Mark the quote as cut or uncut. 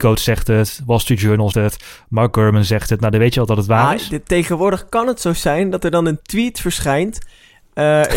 cut